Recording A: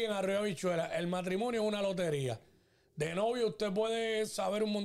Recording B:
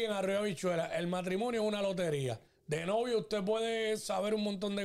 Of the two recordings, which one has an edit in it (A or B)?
B